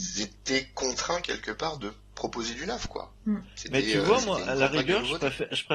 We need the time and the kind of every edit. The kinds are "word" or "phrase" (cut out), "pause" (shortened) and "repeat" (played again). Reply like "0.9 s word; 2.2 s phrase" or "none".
3.2 s pause; 4.4 s word